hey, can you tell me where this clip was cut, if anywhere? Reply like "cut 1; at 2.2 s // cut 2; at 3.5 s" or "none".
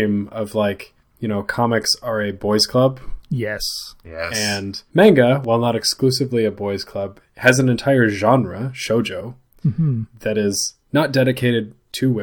cut 1; at 4.9 s // cut 2; at 10.8 s